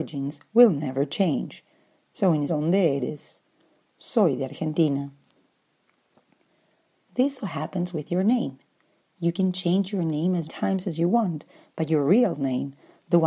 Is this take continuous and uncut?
no; 3 cuts; at 2.5 s, 7.4 s, 10.5 s

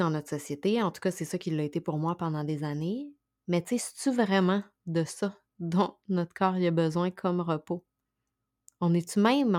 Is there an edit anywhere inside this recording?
no; 0 cuts

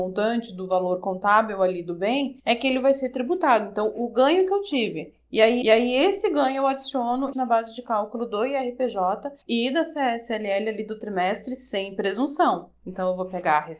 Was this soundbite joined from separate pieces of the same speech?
yes; 4 cuts; at 2.4 s, 5.6 s, 7.3 s, 9.4 s

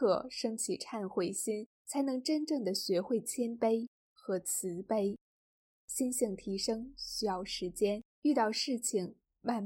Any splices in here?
yes; 2 cuts; at 1.7 s, 8.1 s

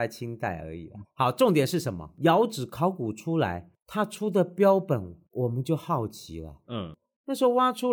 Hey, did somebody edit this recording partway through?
no; 0 cuts

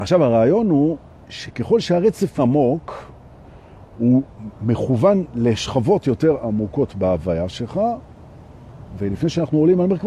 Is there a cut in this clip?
yes; 1 cut; at 2.4 s

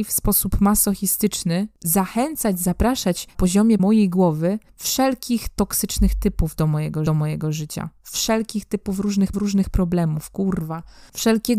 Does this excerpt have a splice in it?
yes; 5 cuts; at 3.3 s, 3.8 s, 4.7 s, 7.1 s, 9.3 s

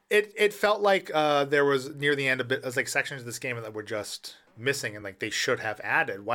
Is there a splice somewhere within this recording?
no; 0 cuts

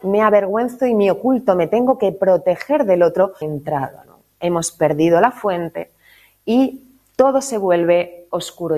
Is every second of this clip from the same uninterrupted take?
no; 1 cut; at 3.4 s

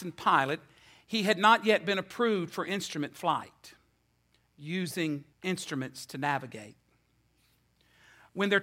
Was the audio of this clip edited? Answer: yes; 1 cut; at 5.3 s

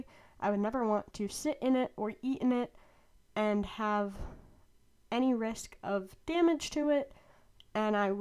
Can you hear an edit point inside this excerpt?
no; 0 cuts

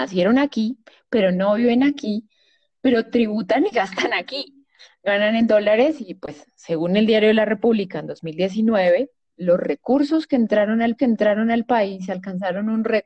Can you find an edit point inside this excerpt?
yes; 1 cut; at 11.0 s

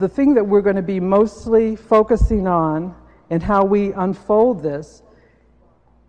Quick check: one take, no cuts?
yes; 0 cuts

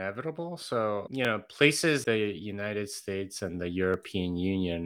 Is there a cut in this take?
yes; 1 cut; at 2.0 s

